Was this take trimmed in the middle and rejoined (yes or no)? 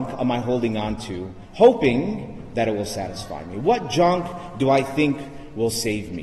no